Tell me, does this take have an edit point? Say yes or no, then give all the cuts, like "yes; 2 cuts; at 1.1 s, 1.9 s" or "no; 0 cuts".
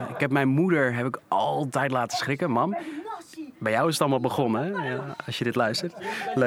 no; 0 cuts